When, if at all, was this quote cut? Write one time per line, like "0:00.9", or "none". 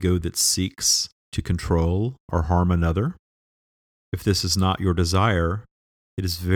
none